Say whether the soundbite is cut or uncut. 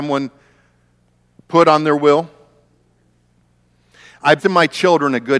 cut